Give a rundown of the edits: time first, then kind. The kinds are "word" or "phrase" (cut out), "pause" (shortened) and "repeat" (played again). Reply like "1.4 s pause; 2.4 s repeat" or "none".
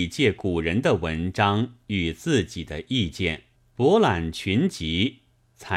3.5 s pause